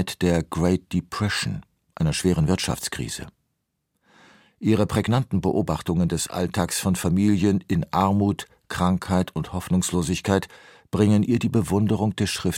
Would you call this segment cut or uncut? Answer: uncut